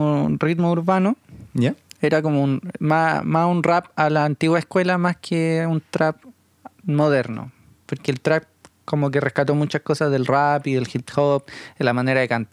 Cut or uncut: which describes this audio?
uncut